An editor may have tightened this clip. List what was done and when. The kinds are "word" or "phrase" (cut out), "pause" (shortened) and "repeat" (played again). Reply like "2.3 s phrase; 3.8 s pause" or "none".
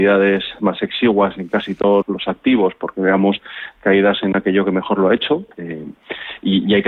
2.0 s word

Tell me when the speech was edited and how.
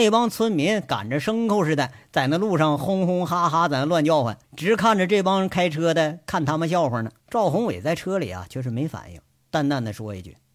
4.4 s pause; 7.2 s pause

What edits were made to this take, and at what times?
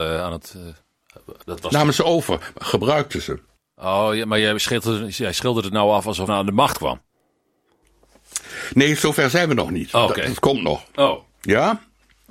1.4 s pause; 3.6 s pause; 6.3 s phrase

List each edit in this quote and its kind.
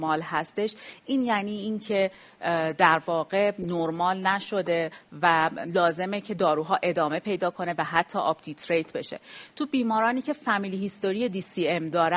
none

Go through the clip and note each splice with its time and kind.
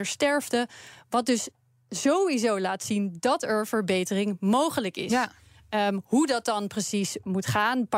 none

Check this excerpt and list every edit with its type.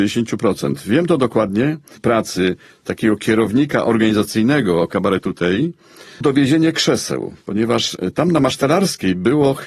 2.0 s phrase; 6.2 s word

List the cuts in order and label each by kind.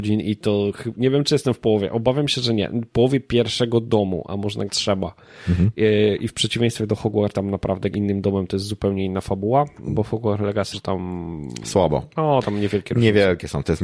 4.7 s word; 7.3 s word; 7.9 s word; 10.7 s phrase

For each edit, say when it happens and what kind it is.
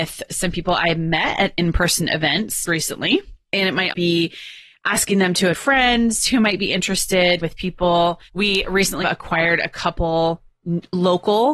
2.7 s word; 3.9 s word; 5.5 s word; 7.4 s word; 8.3 s pause; 9.0 s word

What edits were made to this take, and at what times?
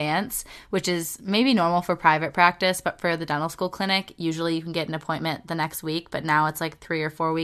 none

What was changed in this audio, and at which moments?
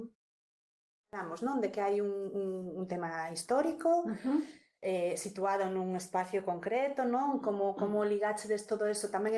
none

